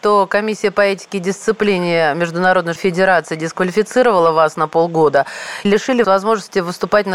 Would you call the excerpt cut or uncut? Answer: cut